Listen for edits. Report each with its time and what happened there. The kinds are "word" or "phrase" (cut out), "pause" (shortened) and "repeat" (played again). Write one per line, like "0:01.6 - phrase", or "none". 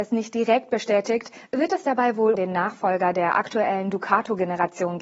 0:02.3 - word